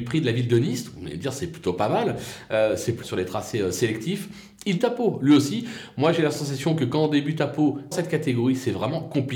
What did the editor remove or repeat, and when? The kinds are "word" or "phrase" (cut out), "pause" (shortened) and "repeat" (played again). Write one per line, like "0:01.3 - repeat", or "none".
0:03.0 - word
0:04.8 - word
0:07.9 - word